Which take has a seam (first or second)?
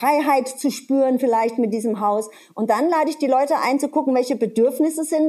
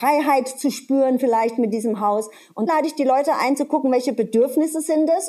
second